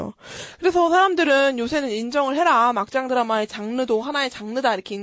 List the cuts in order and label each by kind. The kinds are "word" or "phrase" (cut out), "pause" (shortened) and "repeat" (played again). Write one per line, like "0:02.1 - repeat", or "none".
none